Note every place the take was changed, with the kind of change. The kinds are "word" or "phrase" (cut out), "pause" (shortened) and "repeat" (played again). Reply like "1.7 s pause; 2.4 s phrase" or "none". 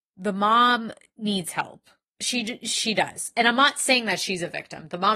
none